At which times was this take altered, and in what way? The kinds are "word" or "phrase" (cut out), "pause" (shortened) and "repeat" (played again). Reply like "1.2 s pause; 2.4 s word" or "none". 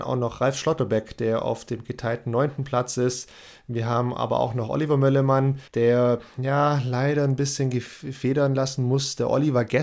5.7 s pause